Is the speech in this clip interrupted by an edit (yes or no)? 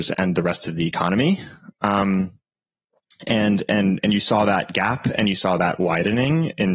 no